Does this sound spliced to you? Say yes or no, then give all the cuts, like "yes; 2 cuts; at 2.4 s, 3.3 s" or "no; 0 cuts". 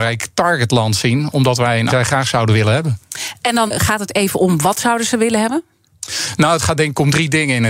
yes; 2 cuts; at 1.9 s, 3.7 s